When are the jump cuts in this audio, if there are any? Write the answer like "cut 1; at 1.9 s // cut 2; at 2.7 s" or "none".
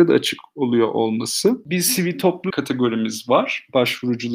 cut 1; at 2.5 s